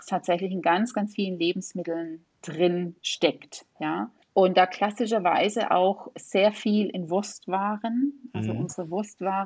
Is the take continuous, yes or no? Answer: no